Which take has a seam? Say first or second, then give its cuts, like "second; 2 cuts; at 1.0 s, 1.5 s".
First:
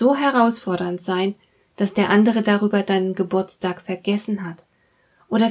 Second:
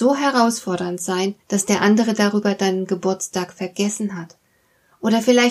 second; 1 cut; at 1.4 s